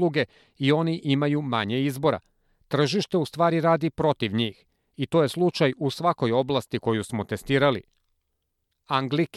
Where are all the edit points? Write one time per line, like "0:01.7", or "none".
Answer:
none